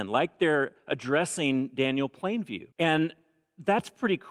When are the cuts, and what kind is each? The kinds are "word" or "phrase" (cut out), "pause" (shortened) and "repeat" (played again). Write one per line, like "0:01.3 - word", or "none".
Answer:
0:02.7 - pause